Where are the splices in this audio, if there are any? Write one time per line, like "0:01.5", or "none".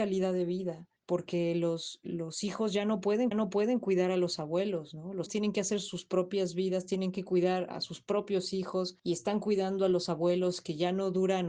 0:01.0
0:03.3
0:05.3
0:07.7
0:09.0